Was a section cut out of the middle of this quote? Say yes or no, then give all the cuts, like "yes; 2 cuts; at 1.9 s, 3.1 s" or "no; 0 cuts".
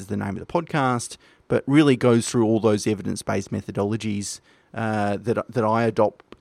no; 0 cuts